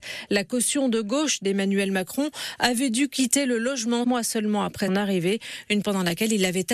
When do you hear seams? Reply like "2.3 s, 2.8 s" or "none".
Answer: 4.0 s, 4.9 s, 5.8 s